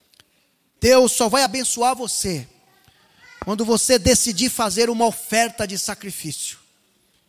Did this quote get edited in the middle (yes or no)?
no